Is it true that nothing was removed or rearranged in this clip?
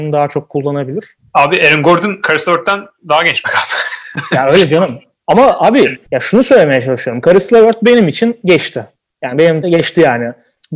no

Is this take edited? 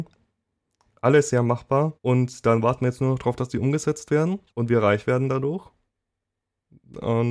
yes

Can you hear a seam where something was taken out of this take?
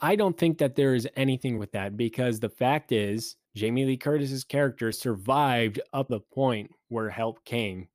yes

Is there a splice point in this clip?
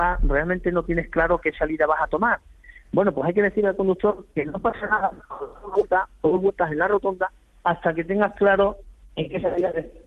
no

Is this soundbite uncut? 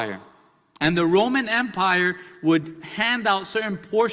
yes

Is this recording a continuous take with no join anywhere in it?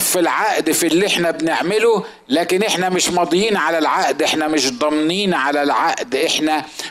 yes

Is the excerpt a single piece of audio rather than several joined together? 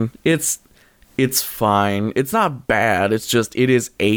yes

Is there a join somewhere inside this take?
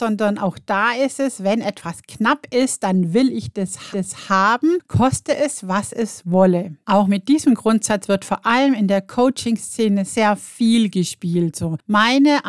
yes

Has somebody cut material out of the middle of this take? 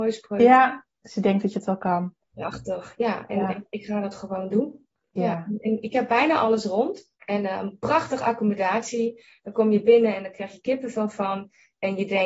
yes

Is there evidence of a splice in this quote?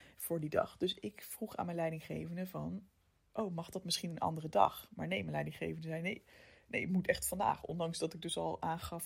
no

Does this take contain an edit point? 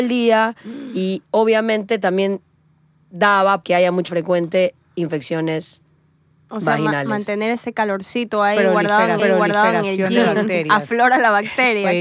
yes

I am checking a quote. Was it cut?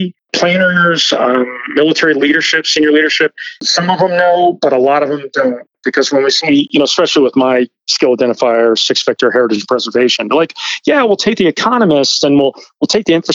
no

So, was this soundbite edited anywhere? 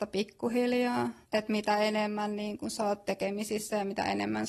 no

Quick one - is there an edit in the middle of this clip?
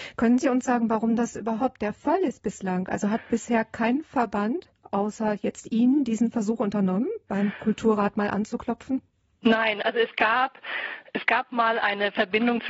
no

